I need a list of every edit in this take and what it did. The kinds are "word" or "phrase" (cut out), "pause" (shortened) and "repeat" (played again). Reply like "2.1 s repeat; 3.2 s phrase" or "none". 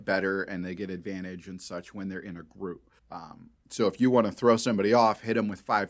3.0 s pause